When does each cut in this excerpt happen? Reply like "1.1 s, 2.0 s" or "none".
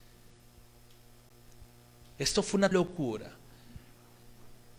2.7 s